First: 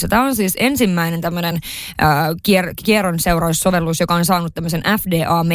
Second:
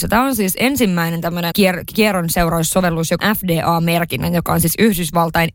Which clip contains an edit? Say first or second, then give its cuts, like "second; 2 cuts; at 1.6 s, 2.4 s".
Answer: second; 2 cuts; at 1.5 s, 3.2 s